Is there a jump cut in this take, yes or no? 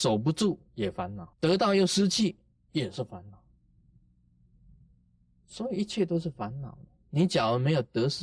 yes